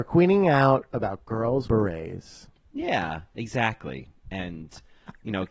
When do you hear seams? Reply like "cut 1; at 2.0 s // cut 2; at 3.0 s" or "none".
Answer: cut 1; at 1.6 s

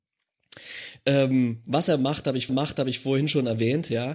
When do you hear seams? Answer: cut 1; at 2.5 s

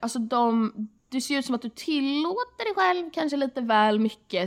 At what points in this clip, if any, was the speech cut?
cut 1; at 1.0 s

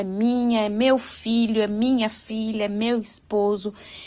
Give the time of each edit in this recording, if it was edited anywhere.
none

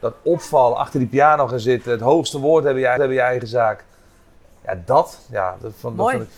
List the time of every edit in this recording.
cut 1; at 3.0 s

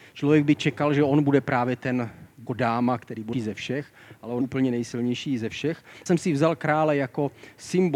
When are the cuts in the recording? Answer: cut 1; at 2.5 s // cut 2; at 3.3 s // cut 3; at 4.4 s // cut 4; at 6.1 s

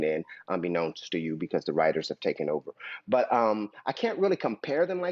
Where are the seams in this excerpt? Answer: none

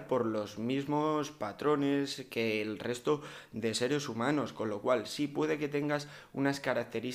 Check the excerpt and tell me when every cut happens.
none

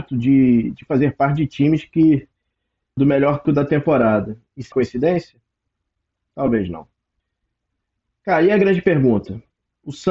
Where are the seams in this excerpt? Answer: cut 1; at 3.0 s // cut 2; at 3.4 s // cut 3; at 4.7 s

